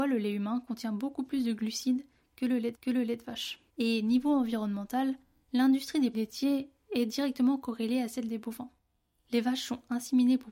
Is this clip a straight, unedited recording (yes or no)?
no